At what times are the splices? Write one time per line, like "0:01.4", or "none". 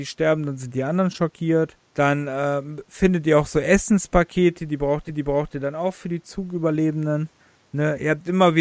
0:01.8
0:05.1
0:07.4